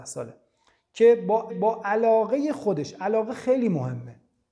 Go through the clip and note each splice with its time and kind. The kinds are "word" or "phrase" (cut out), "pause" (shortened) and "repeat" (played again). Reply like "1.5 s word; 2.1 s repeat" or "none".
1.5 s repeat